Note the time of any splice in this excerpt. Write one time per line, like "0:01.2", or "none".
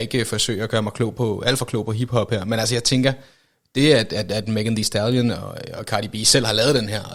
none